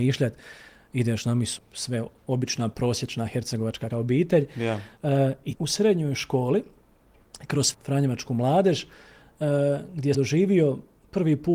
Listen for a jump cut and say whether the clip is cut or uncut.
cut